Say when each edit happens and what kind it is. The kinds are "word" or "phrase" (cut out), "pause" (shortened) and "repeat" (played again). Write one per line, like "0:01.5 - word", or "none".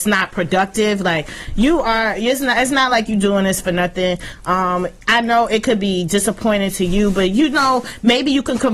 none